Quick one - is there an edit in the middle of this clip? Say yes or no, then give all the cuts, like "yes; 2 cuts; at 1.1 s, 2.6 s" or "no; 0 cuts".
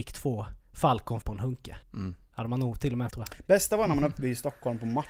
yes; 3 cuts; at 1.2 s, 1.8 s, 3.1 s